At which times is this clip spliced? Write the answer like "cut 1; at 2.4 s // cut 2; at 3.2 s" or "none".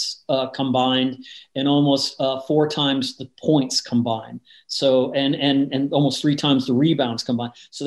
none